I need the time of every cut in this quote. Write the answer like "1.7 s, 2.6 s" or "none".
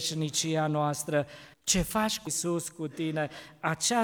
1.5 s, 2.3 s